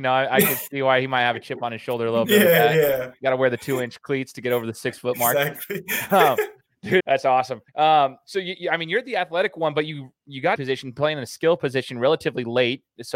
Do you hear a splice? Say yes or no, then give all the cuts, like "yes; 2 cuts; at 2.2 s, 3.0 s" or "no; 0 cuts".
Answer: yes; 3 cuts; at 7.0 s, 7.7 s, 10.6 s